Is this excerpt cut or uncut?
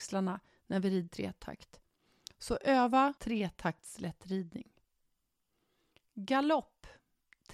cut